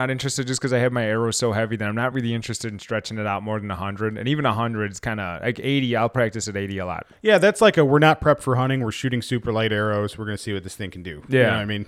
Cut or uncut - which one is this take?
uncut